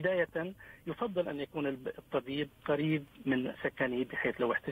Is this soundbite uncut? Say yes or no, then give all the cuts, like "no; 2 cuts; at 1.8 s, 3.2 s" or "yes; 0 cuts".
no; 1 cut; at 3.5 s